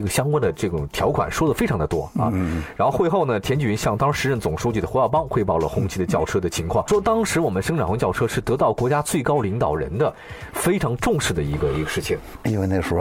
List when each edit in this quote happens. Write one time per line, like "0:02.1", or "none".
0:06.9